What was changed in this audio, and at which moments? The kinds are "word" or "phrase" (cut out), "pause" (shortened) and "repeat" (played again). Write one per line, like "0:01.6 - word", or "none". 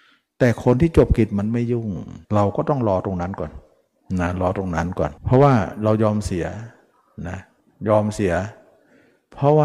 0:02.2 - pause
0:05.2 - pause